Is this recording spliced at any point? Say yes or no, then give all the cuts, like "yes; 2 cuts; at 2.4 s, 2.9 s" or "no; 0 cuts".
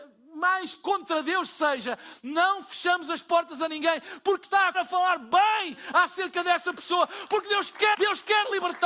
yes; 3 cuts; at 4.4 s, 4.7 s, 7.9 s